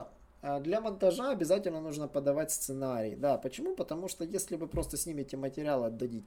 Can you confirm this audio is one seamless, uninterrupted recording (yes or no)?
yes